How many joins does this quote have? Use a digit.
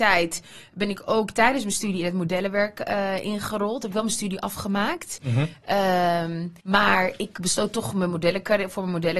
1